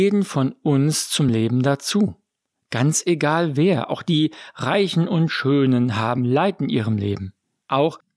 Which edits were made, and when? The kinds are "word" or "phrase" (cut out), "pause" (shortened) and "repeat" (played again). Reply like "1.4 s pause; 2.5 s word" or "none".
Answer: none